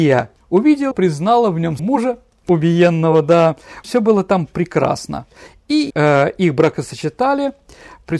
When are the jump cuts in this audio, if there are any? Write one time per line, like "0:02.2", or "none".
0:00.9
0:01.8
0:03.8
0:05.9